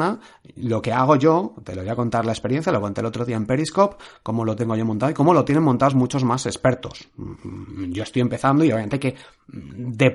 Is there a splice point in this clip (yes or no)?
no